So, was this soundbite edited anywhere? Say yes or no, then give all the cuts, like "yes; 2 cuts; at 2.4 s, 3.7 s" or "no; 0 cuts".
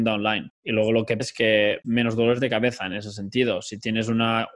yes; 2 cuts; at 1.2 s, 1.8 s